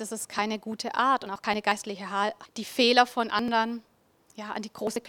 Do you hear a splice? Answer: yes; 1 cut; at 2.4 s

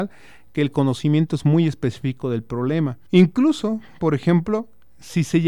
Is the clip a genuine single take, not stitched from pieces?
no; 1 cut; at 3.1 s

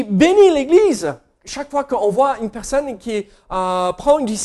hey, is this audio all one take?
yes; 0 cuts

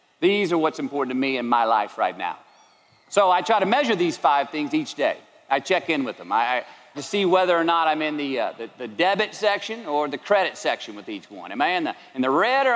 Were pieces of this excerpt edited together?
yes; 1 cut; at 6.9 s

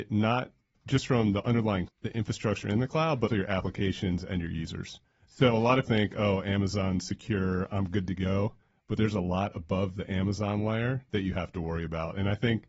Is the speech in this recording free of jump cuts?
no; 3 cuts; at 1.9 s, 3.3 s, 5.8 s

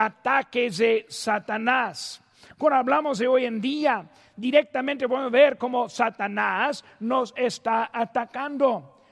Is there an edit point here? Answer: no; 0 cuts

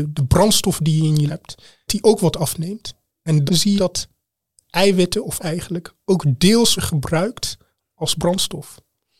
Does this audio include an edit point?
yes; 6 cuts; at 1.3 s, 1.9 s, 3.5 s, 3.8 s, 5.4 s, 6.8 s

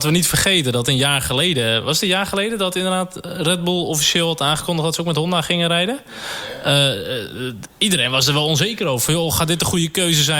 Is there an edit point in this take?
no; 0 cuts

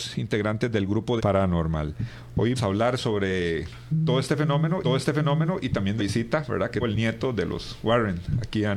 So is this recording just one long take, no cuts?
no; 5 cuts; at 1.2 s, 2.6 s, 4.8 s, 6.0 s, 6.8 s

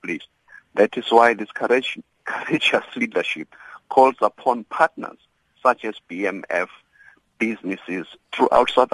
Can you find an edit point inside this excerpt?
no; 0 cuts

